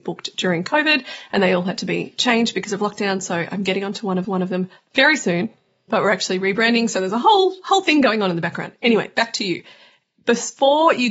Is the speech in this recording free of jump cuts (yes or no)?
no